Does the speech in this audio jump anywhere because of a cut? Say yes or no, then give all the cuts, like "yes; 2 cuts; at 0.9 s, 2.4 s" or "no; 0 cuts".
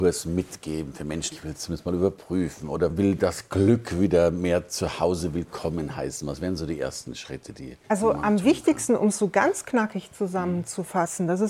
yes; 3 cuts; at 1.3 s, 2.9 s, 7.8 s